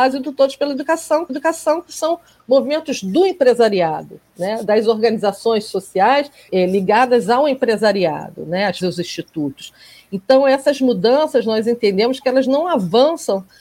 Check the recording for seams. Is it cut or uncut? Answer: cut